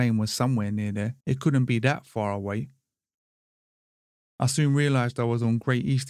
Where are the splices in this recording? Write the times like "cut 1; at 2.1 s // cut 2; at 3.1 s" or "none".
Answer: cut 1; at 1.2 s